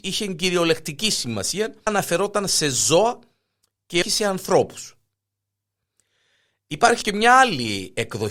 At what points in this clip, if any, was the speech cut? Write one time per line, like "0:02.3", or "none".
0:01.9
0:04.0
0:07.0

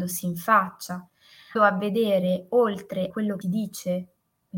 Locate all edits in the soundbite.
0:01.6
0:03.1
0:03.4

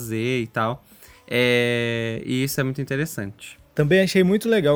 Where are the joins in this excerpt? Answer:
none

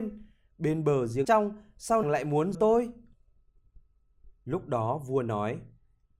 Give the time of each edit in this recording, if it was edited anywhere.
0:01.2
0:02.0
0:02.5
0:04.4

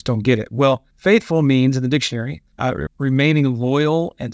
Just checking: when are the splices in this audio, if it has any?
0:00.9
0:02.5
0:02.9

